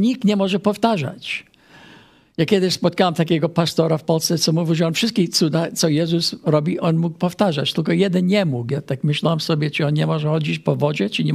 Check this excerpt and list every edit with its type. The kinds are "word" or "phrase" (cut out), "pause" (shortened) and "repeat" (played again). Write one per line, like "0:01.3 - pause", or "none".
none